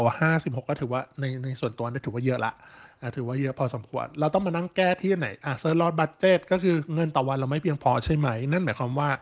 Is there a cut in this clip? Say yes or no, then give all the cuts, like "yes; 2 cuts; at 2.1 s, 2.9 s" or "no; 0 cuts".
no; 0 cuts